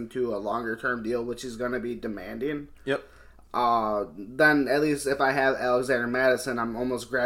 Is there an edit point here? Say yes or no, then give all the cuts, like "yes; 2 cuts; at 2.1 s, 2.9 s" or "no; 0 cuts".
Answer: no; 0 cuts